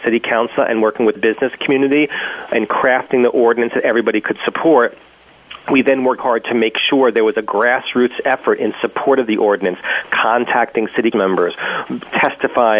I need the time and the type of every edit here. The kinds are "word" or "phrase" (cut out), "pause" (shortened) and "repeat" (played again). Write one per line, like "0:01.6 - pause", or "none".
0:01.2 - phrase
0:06.2 - word
0:11.1 - word